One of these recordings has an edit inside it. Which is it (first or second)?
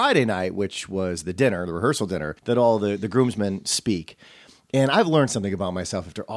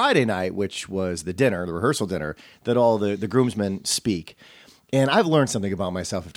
first